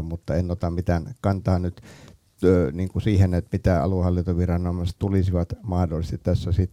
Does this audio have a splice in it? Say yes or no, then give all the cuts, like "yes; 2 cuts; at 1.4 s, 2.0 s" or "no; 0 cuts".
no; 0 cuts